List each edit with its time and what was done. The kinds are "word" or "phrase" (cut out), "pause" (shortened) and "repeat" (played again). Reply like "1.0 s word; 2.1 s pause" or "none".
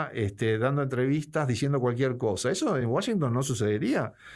none